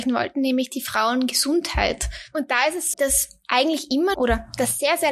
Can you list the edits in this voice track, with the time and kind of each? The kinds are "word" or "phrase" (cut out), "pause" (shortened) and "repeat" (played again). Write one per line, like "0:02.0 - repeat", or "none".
0:02.9 - word
0:04.1 - word